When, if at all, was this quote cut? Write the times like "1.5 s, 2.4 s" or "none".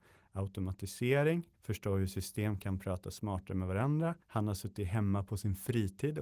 1.5 s, 4.2 s